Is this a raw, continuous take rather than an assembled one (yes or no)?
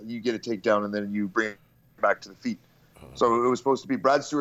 yes